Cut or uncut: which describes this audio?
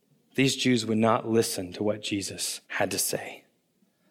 cut